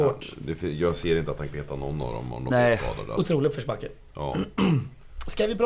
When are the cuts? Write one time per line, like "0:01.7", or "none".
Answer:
0:01.5
0:02.5

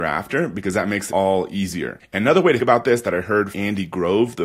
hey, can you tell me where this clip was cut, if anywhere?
0:01.1
0:02.6
0:03.5

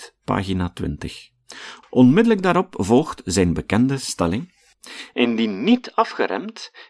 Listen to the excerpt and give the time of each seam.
none

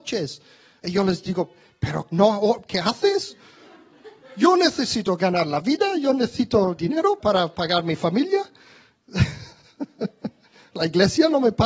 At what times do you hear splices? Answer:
0:02.7
0:06.8
0:07.2

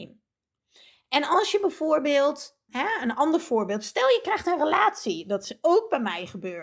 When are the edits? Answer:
0:02.7

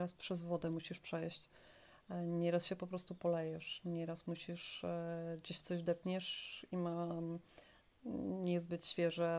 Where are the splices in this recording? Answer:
none

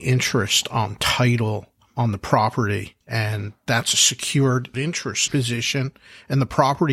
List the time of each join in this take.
0:03.0
0:05.3

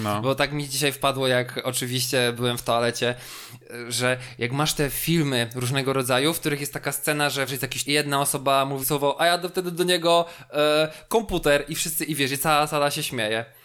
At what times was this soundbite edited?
0:07.5
0:07.9
0:08.8

